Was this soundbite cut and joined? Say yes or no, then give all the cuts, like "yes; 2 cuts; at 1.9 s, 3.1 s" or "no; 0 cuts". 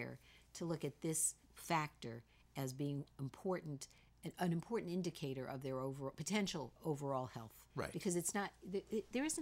yes; 3 cuts; at 1.4 s, 6.8 s, 7.7 s